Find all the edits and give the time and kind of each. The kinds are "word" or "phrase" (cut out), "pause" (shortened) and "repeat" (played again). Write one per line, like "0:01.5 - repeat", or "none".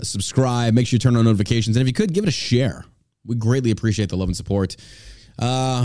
none